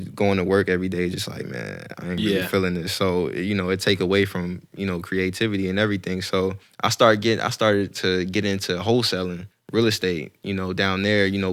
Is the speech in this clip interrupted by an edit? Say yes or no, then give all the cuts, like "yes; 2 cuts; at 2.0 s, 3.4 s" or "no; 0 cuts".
yes; 2 cuts; at 6.6 s, 9.5 s